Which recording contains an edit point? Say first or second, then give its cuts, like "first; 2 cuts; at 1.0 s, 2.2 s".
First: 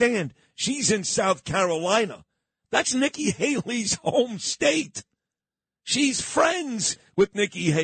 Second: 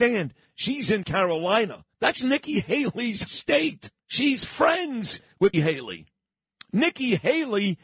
second; 5 cuts; at 1.0 s, 1.9 s, 3.3 s, 4.0 s, 5.5 s